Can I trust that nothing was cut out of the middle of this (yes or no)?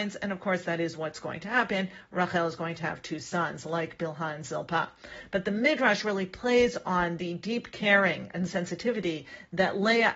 yes